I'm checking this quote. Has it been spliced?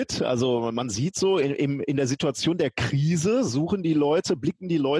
no; 0 cuts

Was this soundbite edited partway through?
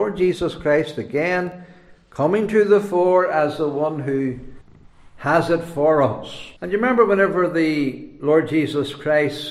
yes; 1 cut; at 6.6 s

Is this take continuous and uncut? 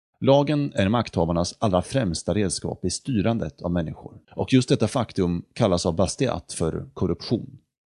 no; 1 cut; at 4.2 s

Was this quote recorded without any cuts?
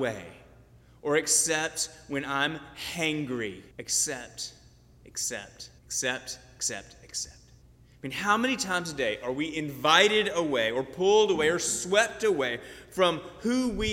no; 3 cuts; at 3.7 s, 5.8 s, 7.6 s

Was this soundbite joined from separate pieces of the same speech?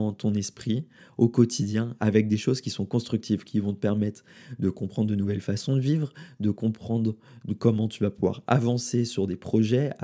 no; 0 cuts

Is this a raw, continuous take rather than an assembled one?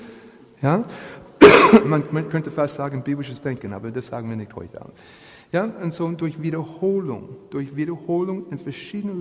yes; 0 cuts

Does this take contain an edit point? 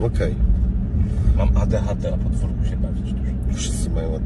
yes; 1 cut; at 2.1 s

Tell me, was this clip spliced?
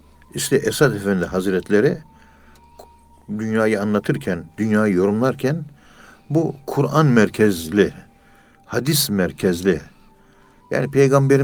no; 0 cuts

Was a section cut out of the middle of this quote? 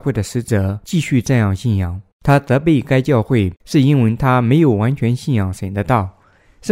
yes; 2 cuts; at 2.1 s, 3.6 s

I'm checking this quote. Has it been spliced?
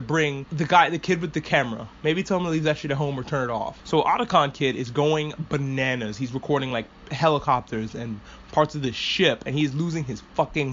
no; 0 cuts

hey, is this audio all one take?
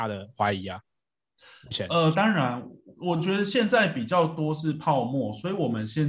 yes; 0 cuts

